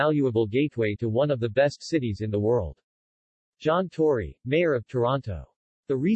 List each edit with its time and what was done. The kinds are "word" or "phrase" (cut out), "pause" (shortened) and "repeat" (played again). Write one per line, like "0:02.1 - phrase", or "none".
none